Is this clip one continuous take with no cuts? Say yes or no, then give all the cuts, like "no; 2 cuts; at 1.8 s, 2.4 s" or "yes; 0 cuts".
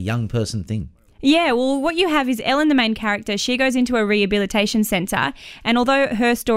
yes; 0 cuts